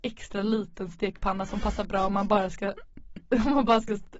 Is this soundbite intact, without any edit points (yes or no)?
yes